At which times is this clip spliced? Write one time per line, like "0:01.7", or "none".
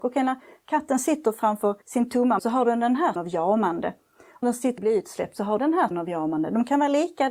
0:01.8
0:02.4
0:03.2
0:04.4
0:04.8
0:05.6
0:05.9